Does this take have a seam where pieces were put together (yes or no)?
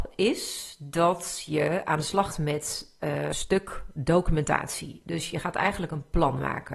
yes